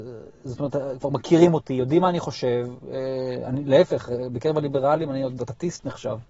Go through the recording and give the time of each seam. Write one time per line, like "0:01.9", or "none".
none